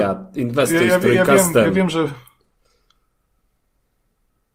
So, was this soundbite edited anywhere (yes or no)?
no